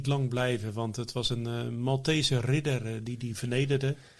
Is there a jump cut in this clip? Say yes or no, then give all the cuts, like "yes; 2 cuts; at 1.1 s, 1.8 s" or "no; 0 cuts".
no; 0 cuts